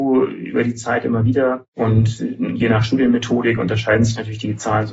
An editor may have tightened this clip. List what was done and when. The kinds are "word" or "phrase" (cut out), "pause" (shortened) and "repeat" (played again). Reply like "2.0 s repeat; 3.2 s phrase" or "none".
none